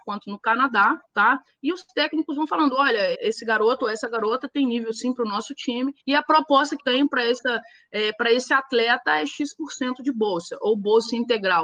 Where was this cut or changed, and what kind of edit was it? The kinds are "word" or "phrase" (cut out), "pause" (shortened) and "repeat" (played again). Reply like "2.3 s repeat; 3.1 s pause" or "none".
1.0 s pause; 3.1 s word; 6.0 s pause; 6.8 s word